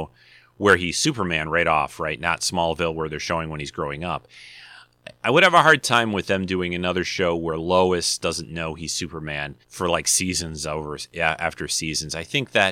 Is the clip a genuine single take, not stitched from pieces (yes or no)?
no